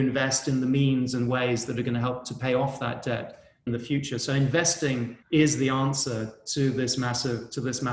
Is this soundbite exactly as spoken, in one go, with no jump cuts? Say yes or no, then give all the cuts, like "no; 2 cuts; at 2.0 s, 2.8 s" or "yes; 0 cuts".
no; 2 cuts; at 3.7 s, 5.2 s